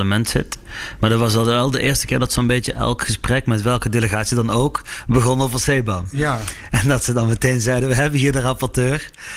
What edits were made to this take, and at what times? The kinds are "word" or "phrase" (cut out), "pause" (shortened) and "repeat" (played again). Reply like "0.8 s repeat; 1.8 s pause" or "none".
none